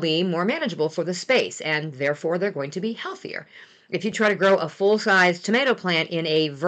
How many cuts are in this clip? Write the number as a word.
zero